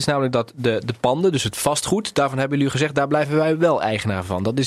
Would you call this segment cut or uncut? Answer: uncut